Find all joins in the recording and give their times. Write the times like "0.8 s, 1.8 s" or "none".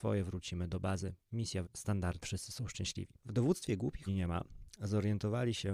1.6 s, 2.2 s, 3.2 s, 4.1 s